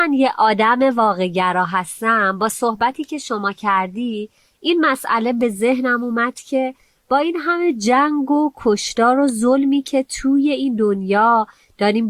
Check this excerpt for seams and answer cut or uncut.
uncut